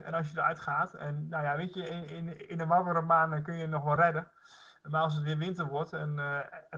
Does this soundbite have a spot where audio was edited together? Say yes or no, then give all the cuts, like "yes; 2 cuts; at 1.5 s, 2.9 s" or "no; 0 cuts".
no; 0 cuts